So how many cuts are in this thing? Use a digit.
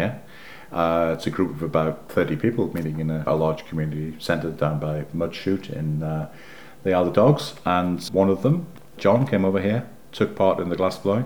4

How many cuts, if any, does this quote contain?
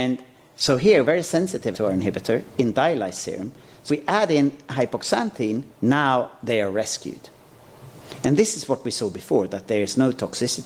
4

